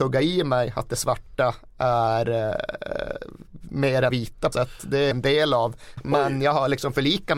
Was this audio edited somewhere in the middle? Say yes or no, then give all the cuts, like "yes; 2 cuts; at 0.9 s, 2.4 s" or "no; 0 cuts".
yes; 4 cuts; at 4.1 s, 4.5 s, 5.1 s, 6.0 s